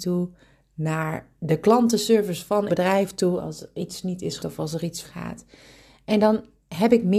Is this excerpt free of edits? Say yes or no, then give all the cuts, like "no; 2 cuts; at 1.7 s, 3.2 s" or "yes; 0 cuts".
no; 3 cuts; at 2.7 s, 4.4 s, 5.0 s